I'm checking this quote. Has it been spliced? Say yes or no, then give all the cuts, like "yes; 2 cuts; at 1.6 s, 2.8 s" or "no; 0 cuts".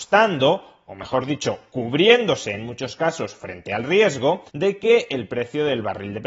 yes; 1 cut; at 4.5 s